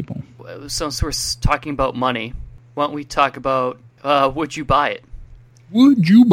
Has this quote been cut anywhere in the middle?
no; 0 cuts

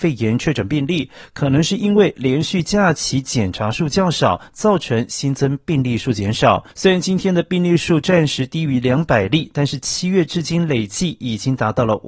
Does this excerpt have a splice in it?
yes; 1 cut; at 6.7 s

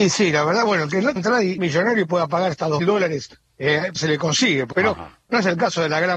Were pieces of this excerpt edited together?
yes; 5 cuts; at 1.2 s, 1.6 s, 2.8 s, 4.0 s, 4.7 s

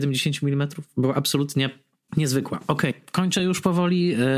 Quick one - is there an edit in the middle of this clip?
no; 0 cuts

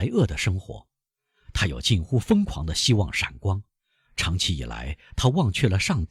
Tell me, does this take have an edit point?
no; 0 cuts

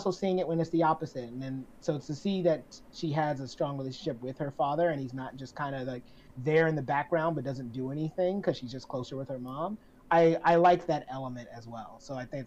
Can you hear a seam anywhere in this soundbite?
no; 0 cuts

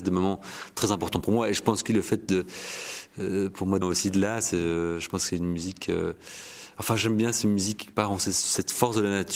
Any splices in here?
yes; 3 cuts; at 1.9 s, 3.8 s, 7.8 s

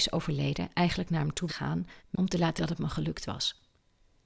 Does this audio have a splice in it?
yes; 3 cuts; at 1.5 s, 2.0 s, 2.6 s

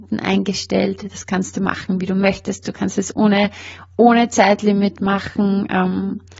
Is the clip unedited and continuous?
yes; 0 cuts

